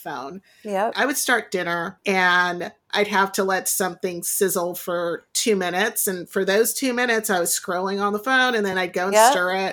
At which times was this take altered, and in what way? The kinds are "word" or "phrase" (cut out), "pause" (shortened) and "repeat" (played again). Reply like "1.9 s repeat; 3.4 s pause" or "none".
none